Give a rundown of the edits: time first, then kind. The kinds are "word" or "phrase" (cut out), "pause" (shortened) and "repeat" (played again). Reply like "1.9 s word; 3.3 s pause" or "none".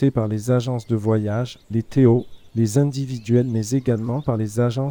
1.6 s pause